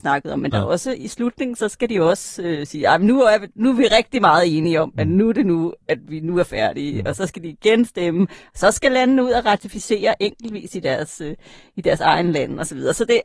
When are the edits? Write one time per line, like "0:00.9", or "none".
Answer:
none

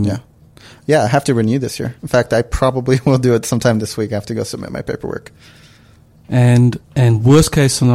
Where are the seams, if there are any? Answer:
0:02.0
0:06.8

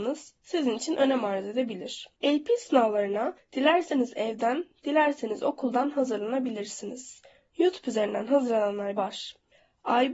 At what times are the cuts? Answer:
0:02.1
0:07.4
0:09.0

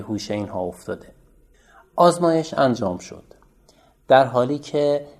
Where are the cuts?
none

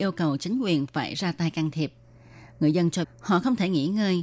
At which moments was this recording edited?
0:03.0

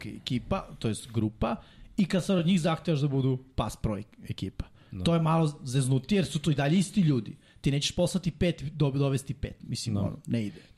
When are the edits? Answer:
none

